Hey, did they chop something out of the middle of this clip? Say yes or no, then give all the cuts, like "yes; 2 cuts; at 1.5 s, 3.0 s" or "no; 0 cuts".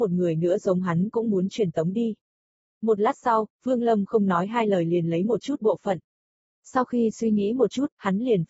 no; 0 cuts